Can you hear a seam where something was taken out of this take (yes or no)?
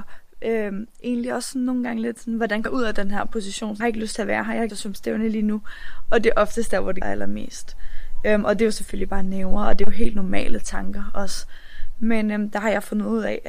yes